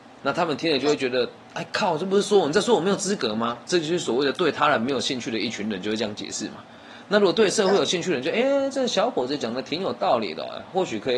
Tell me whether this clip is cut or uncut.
uncut